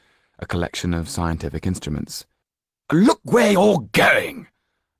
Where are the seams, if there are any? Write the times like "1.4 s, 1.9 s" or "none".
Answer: none